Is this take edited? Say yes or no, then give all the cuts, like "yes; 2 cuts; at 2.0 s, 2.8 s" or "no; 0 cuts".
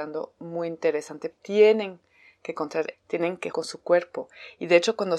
yes; 3 cuts; at 1.3 s, 2.9 s, 3.5 s